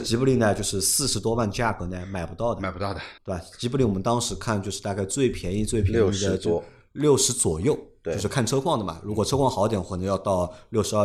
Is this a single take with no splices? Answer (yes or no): no